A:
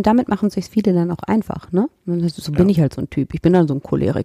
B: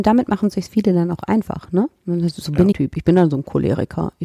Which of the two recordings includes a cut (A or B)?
B